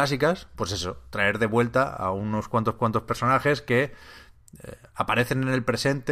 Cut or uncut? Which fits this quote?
cut